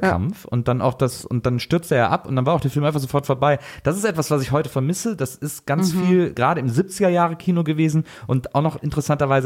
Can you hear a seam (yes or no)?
no